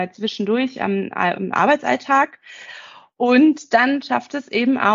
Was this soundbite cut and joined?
no; 0 cuts

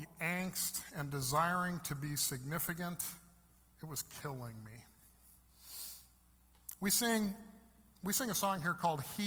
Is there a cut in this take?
no; 0 cuts

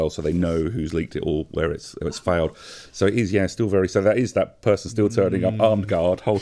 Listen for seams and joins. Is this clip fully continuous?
yes; 0 cuts

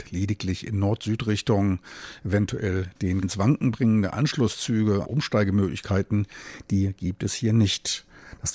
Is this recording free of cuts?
no; 2 cuts; at 3.2 s, 5.0 s

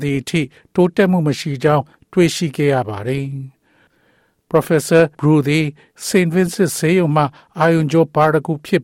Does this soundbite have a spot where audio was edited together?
yes; 1 cut; at 5.1 s

